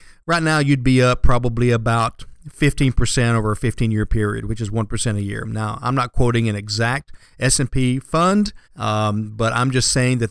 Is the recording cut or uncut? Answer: cut